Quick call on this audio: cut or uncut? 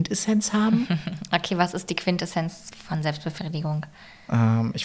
uncut